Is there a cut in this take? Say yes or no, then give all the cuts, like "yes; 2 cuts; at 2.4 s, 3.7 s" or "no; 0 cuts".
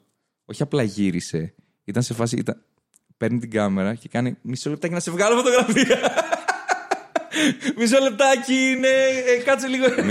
no; 0 cuts